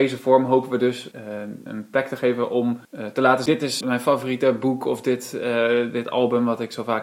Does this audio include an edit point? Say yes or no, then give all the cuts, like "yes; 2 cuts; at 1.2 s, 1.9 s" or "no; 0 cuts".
yes; 5 cuts; at 1.1 s, 1.7 s, 2.8 s, 3.5 s, 3.8 s